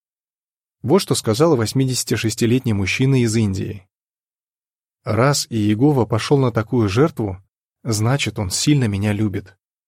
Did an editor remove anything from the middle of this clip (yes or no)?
no